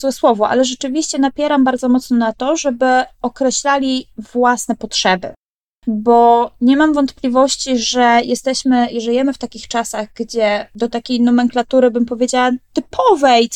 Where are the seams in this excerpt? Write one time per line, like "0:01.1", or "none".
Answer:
none

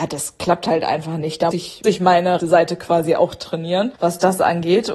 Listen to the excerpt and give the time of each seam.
0:01.5
0:01.8
0:02.4
0:04.0

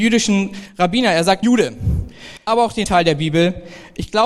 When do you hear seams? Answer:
0:01.4
0:02.5
0:02.8

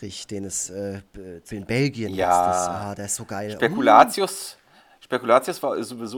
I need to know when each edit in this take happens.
0:01.5

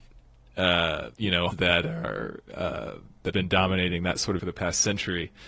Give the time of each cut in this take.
0:01.1
0:01.5
0:03.3
0:04.4

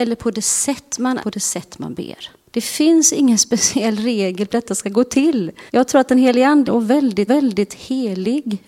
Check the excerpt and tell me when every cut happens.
0:01.2
0:02.5
0:04.5
0:05.7
0:06.6
0:07.3

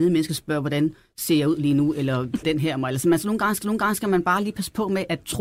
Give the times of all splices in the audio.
0:02.4
0:03.6

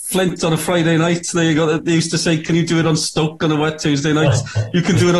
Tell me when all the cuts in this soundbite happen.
none

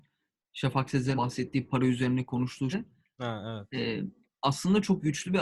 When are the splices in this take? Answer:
0:01.2
0:02.7
0:04.2

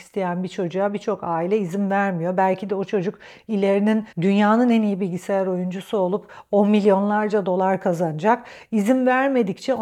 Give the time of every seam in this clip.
0:04.1

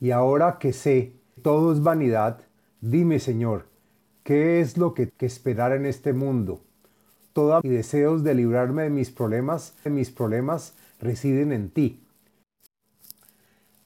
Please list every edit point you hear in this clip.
0:01.4
0:05.1
0:07.6
0:09.9

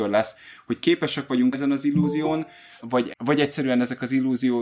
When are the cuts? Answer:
0:01.5
0:02.8
0:03.1

